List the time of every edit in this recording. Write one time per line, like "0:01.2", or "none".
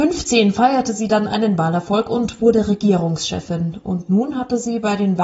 none